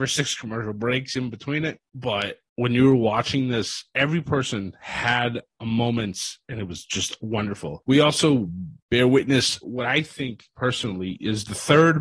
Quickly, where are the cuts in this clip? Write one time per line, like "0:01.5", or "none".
0:09.6